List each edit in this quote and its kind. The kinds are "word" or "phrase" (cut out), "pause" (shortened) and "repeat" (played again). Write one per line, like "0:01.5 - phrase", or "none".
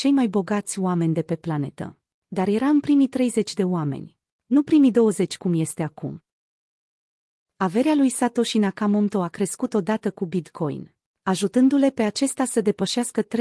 none